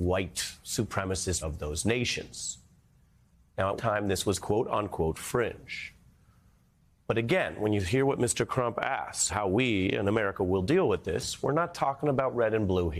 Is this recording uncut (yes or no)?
no